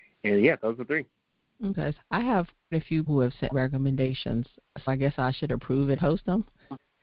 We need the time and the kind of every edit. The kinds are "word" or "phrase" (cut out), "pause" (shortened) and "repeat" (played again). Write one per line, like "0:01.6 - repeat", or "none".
0:02.0 - word
0:02.7 - word
0:03.1 - word
0:03.5 - word
0:04.9 - word
0:06.0 - word